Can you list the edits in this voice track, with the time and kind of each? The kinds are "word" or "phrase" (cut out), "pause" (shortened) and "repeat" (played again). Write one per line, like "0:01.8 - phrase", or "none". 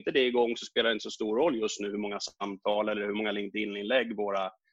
none